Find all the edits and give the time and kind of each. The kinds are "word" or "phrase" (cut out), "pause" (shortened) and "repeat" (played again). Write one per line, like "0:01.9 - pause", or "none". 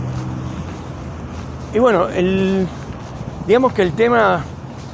none